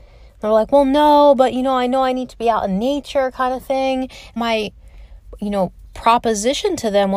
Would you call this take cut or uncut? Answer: cut